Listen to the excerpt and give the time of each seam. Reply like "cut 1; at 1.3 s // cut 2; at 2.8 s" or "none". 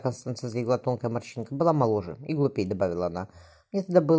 none